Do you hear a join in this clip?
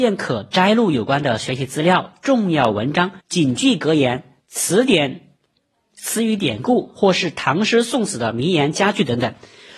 yes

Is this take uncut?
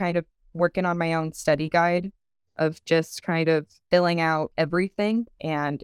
yes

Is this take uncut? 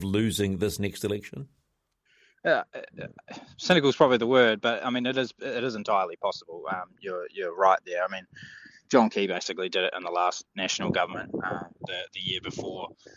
yes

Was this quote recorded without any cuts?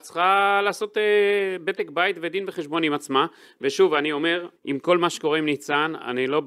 no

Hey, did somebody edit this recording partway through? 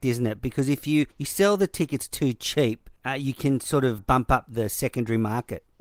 yes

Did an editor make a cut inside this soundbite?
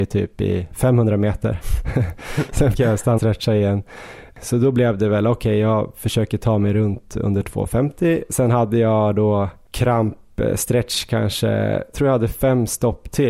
yes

